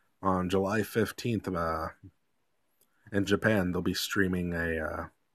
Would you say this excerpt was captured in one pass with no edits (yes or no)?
yes